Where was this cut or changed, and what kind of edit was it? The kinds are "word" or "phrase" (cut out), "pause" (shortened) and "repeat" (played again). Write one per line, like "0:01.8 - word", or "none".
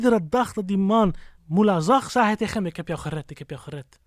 0:01.4 - pause